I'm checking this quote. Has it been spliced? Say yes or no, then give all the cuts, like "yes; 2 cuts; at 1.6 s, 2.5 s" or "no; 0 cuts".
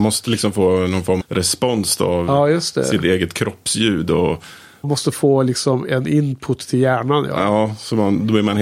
yes; 2 cuts; at 1.2 s, 4.8 s